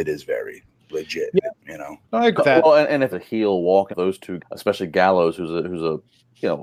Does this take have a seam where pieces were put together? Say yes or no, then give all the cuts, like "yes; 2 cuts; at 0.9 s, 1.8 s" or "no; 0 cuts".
yes; 6 cuts; at 1.6 s, 2.0 s, 2.4 s, 3.1 s, 3.9 s, 4.4 s